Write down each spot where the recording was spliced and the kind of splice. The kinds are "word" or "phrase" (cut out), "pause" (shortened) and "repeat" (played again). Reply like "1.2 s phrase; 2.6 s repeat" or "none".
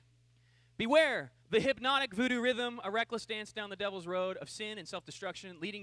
1.4 s pause